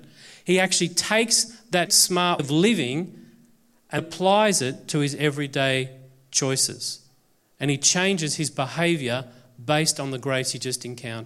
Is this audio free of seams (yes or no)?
no